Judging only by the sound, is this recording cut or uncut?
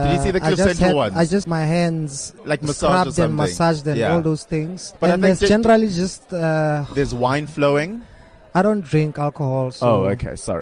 cut